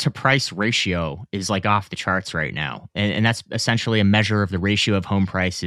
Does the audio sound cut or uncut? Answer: uncut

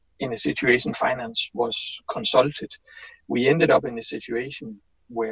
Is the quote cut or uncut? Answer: cut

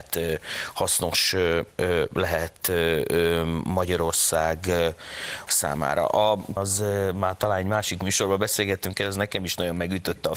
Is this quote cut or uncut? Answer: cut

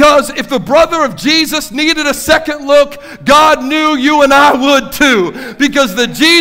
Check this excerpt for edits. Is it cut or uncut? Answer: uncut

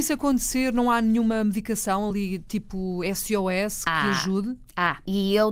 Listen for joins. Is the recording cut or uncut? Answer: uncut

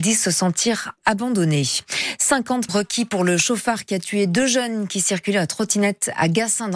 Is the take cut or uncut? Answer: cut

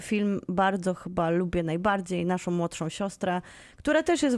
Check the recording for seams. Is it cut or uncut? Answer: uncut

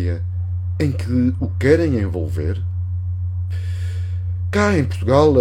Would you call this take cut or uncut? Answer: uncut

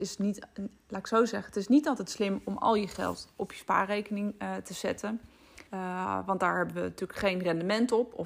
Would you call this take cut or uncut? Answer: cut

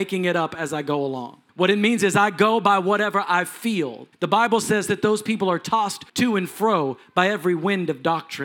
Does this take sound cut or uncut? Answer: cut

